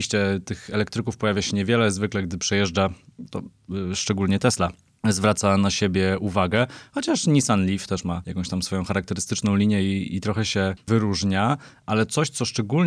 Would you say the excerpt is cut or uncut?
uncut